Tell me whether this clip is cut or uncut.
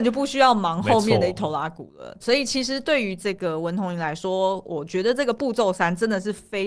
cut